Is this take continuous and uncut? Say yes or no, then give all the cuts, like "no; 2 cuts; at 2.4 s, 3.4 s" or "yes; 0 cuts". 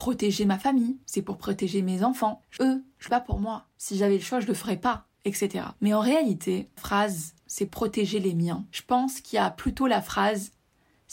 no; 6 cuts; at 1.0 s, 2.6 s, 3.1 s, 5.7 s, 6.8 s, 7.7 s